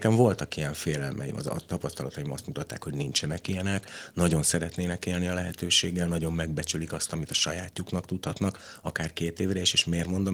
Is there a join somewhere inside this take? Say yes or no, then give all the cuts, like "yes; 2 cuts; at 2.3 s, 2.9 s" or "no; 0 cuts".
no; 0 cuts